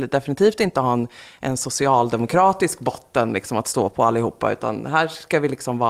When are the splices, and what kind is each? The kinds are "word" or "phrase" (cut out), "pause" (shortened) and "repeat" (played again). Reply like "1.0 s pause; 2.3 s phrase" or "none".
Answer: none